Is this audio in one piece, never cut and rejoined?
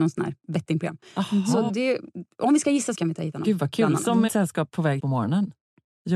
no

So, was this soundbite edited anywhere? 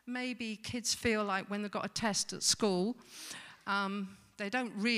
no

